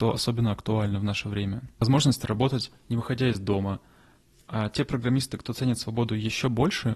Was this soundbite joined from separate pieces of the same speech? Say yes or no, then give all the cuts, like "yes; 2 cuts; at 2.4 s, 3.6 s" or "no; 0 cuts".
no; 0 cuts